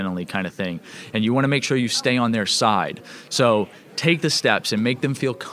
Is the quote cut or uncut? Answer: uncut